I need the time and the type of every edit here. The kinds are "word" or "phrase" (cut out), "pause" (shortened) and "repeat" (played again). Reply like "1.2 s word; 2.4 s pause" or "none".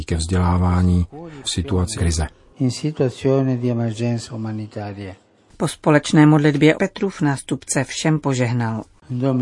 1.4 s word; 1.9 s word; 6.7 s word